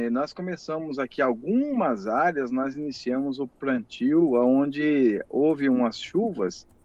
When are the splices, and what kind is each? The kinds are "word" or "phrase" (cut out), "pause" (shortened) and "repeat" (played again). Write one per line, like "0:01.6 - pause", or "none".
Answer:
none